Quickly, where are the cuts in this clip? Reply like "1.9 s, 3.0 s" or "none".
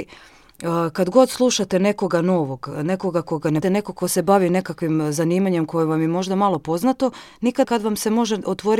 3.6 s, 7.6 s